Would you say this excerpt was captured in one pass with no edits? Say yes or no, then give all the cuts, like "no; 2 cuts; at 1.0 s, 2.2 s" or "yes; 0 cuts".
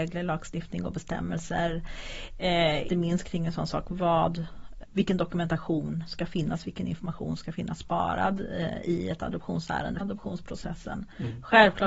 no; 3 cuts; at 2.9 s, 4.8 s, 10.0 s